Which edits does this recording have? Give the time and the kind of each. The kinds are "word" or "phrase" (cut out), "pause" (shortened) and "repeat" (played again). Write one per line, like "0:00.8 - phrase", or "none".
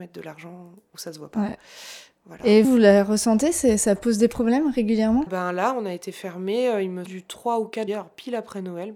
0:02.6 - word
0:05.3 - word
0:07.1 - word
0:07.9 - word